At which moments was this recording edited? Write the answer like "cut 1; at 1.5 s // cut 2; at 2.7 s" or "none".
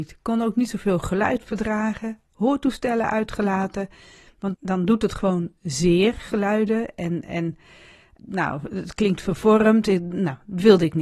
cut 1; at 4.5 s // cut 2; at 8.2 s